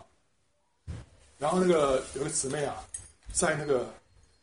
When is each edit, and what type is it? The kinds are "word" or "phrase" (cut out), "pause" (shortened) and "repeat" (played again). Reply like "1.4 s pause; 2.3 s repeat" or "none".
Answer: none